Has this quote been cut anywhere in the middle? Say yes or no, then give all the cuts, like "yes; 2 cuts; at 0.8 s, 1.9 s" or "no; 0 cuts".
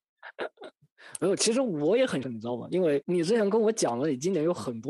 yes; 1 cut; at 2.2 s